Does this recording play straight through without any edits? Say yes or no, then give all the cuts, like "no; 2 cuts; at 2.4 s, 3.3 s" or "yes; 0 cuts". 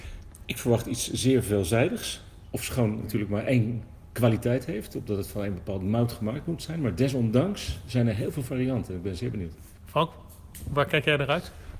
no; 1 cut; at 3.0 s